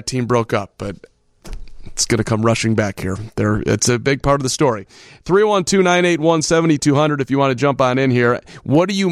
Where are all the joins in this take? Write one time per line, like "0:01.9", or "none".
none